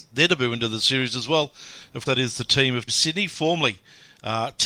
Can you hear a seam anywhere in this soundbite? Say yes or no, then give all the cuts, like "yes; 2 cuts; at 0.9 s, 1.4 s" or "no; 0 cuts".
yes; 2 cuts; at 2.1 s, 2.9 s